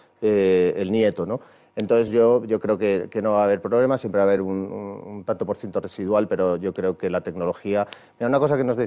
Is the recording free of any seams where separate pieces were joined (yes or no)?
yes